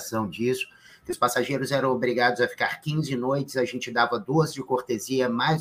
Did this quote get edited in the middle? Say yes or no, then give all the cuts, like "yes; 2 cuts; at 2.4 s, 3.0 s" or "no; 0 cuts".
no; 0 cuts